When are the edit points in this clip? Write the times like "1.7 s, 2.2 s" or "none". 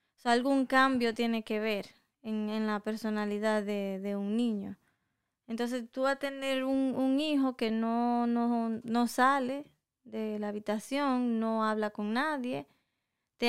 none